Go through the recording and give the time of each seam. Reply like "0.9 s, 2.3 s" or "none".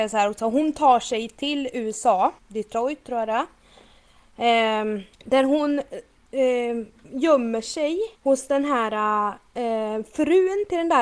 2.4 s, 5.1 s, 8.1 s